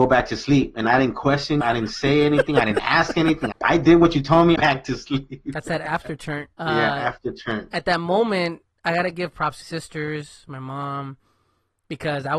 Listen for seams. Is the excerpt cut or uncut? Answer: cut